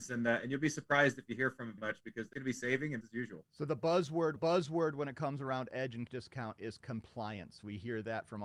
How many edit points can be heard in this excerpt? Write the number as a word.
six